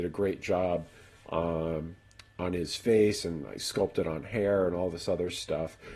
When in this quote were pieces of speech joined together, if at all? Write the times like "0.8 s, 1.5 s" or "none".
none